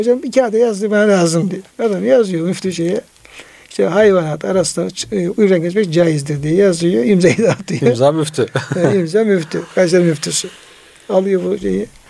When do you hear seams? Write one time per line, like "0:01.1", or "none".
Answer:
0:01.7